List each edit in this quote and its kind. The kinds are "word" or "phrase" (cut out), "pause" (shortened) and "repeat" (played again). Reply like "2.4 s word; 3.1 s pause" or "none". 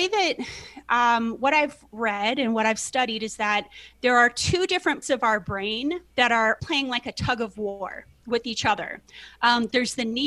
5.0 s word; 6.1 s pause; 6.6 s word